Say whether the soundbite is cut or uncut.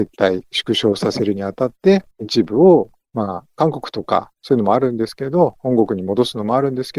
cut